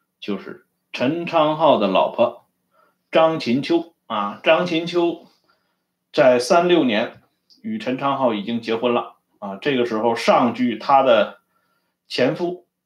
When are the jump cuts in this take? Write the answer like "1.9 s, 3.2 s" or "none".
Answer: none